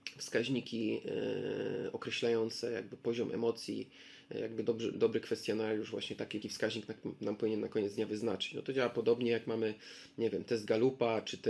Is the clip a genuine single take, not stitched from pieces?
no; 2 cuts; at 4.9 s, 6.4 s

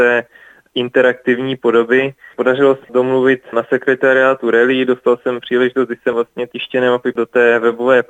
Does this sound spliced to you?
yes; 5 cuts; at 2.8 s, 3.5 s, 6.1 s, 6.5 s, 7.1 s

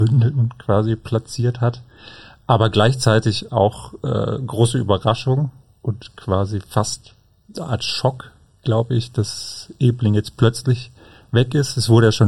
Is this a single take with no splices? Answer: yes; 0 cuts

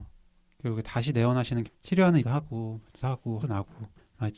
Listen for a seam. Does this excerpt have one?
yes; 4 cuts; at 1.7 s, 2.2 s, 3.0 s, 3.4 s

